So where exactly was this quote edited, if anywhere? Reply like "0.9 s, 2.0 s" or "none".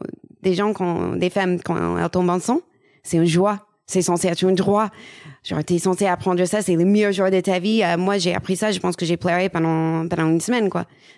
none